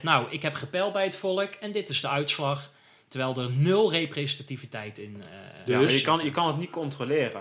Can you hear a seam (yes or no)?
no